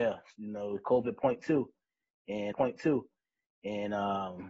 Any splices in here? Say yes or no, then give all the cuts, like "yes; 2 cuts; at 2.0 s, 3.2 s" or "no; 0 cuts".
yes; 1 cut; at 2.5 s